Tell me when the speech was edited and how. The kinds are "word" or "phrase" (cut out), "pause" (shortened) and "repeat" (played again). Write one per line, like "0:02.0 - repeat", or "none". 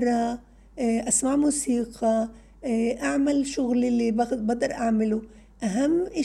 none